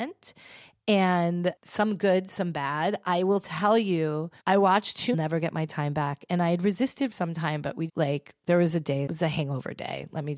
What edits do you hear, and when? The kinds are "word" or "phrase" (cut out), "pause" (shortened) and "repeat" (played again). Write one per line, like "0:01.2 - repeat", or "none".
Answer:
0:04.4 - pause
0:05.1 - phrase
0:07.1 - word
0:07.9 - word
0:09.1 - word